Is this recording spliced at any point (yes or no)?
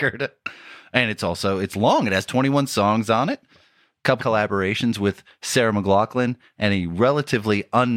yes